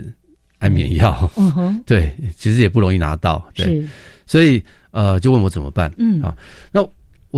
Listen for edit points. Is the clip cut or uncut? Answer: uncut